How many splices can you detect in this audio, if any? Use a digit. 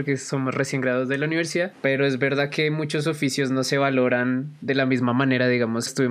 0